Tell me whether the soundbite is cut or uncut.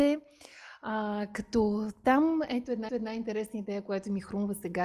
cut